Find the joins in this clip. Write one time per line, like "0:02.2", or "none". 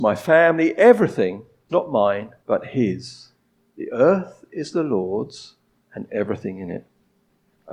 0:01.7
0:02.4
0:03.6